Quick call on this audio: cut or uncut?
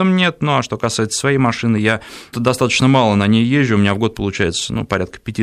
cut